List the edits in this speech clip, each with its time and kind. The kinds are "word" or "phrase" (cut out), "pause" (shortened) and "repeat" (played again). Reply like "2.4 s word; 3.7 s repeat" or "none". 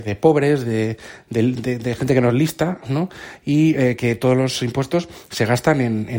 none